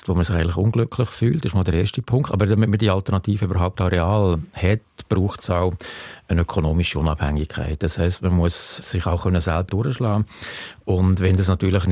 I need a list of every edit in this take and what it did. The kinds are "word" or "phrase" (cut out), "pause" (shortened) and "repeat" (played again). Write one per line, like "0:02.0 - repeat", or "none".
0:08.8 - word
0:09.7 - word